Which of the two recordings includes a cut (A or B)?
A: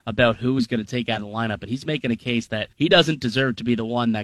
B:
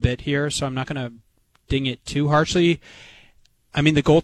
A